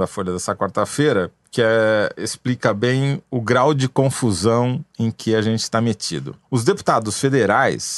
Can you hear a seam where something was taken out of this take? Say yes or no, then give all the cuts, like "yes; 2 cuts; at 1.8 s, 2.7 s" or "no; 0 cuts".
no; 0 cuts